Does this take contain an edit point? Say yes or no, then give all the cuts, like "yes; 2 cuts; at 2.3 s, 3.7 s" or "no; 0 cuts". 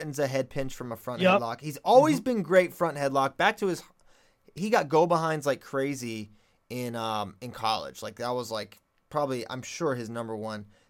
no; 0 cuts